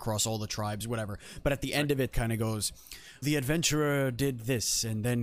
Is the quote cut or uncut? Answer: cut